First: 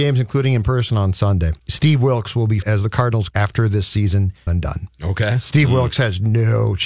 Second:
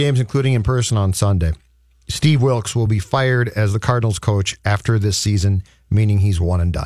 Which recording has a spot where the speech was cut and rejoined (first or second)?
first